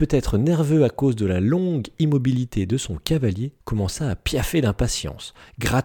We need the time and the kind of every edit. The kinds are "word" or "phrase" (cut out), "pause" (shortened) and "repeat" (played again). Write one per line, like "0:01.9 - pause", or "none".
0:03.6 - pause